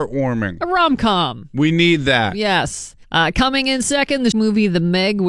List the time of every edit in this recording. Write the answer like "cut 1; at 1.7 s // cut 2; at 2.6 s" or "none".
cut 1; at 3.0 s // cut 2; at 4.3 s